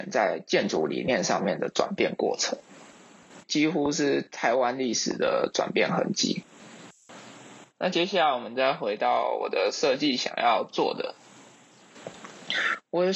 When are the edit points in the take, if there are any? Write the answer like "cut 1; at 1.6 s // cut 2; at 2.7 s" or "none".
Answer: cut 1; at 3.4 s